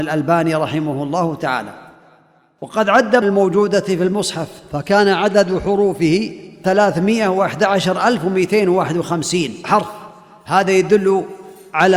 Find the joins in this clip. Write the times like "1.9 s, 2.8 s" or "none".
3.2 s